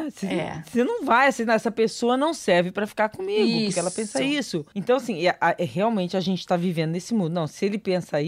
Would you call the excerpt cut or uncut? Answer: uncut